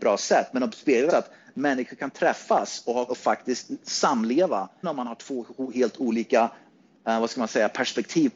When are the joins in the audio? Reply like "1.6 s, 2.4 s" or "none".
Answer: 1.1 s, 3.1 s, 4.8 s